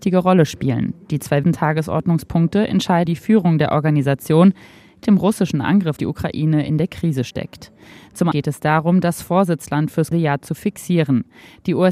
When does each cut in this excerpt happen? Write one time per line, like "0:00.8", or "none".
0:01.4
0:03.1
0:05.0
0:06.0
0:08.3
0:10.1